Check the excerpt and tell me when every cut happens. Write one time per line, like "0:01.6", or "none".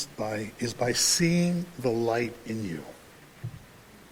none